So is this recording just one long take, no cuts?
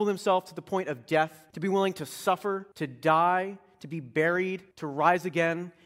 no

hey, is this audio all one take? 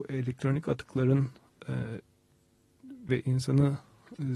no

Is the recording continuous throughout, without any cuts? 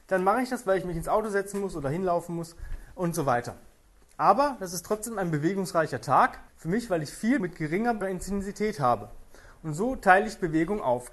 no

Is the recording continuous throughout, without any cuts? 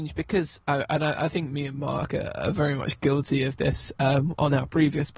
yes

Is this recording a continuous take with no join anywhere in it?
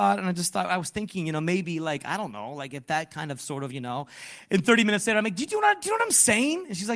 yes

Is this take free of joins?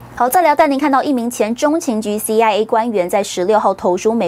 yes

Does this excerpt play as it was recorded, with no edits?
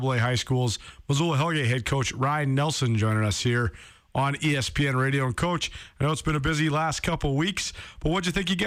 yes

